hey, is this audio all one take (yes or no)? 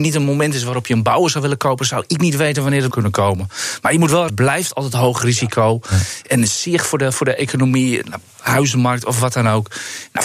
no